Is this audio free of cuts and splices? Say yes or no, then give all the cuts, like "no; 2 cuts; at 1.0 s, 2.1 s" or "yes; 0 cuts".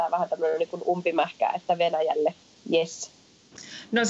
yes; 0 cuts